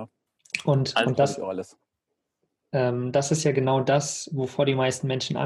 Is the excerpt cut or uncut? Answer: uncut